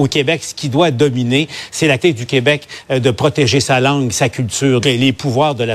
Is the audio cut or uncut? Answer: cut